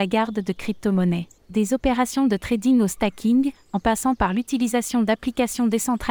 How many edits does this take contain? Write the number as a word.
one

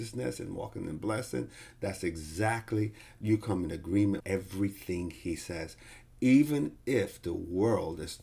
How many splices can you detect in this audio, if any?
one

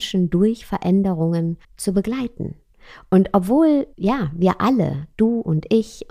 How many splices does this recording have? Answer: three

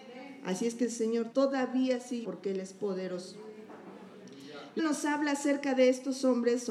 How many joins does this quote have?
three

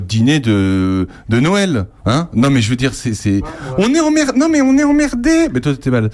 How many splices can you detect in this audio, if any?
one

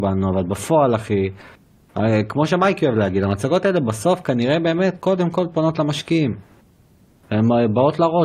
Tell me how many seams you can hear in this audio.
zero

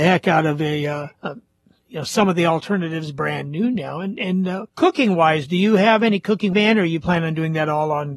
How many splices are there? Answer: three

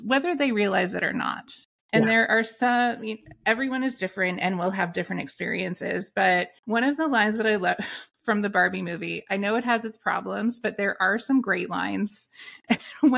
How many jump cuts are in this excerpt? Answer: two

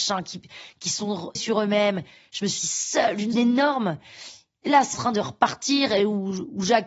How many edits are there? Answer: four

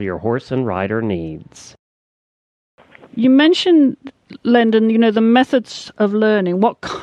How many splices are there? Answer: zero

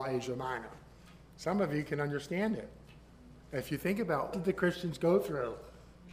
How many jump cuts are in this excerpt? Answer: one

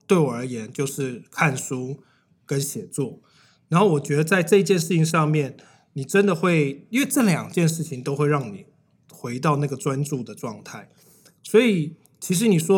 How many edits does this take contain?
zero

